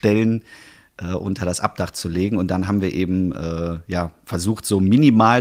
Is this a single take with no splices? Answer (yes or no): yes